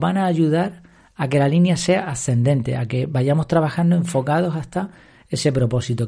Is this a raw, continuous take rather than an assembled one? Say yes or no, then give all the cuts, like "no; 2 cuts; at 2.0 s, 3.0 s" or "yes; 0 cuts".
yes; 0 cuts